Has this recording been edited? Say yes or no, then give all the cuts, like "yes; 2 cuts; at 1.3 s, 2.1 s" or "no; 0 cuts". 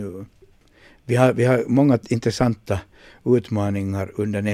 no; 0 cuts